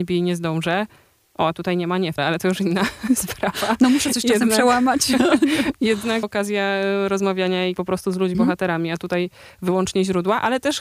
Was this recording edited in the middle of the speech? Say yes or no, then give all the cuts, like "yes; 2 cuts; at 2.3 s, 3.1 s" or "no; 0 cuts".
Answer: yes; 4 cuts; at 2.2 s, 6.2 s, 7.8 s, 8.3 s